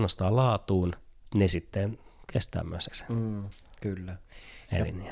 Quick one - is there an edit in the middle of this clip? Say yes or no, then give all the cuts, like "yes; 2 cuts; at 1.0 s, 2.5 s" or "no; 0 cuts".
yes; 2 cuts; at 1.3 s, 2.9 s